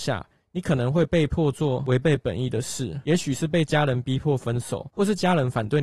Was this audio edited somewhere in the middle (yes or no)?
no